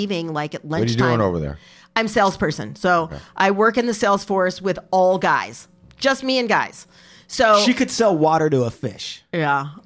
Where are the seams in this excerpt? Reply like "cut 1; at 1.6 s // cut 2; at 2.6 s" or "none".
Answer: none

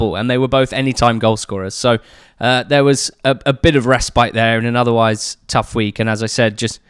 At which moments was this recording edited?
none

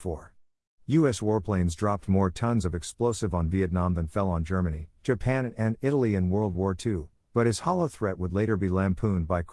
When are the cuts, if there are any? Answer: none

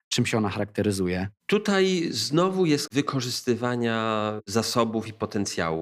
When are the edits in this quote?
cut 1; at 2.9 s

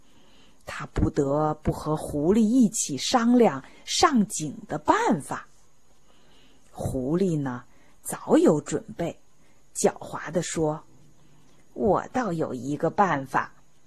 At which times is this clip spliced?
none

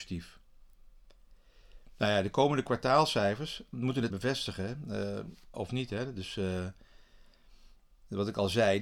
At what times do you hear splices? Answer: cut 1; at 4.1 s // cut 2; at 5.5 s

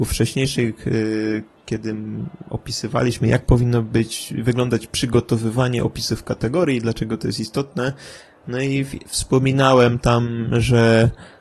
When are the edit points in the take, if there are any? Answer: none

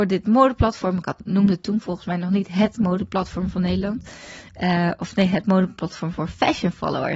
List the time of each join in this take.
none

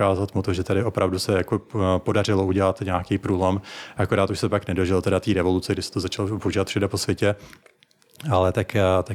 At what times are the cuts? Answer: none

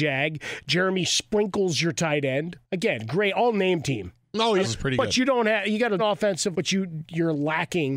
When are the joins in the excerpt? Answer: cut 1; at 2.6 s // cut 2; at 4.6 s // cut 3; at 6.0 s // cut 4; at 6.5 s

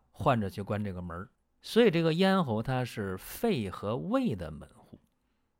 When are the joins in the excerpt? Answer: cut 1; at 1.3 s

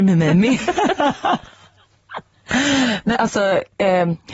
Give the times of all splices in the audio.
cut 1; at 3.1 s

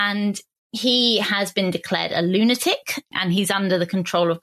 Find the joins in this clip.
none

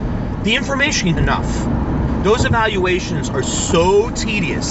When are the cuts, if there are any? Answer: cut 1; at 1.2 s

